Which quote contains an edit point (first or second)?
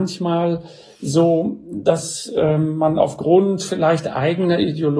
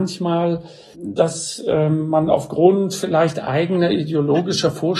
second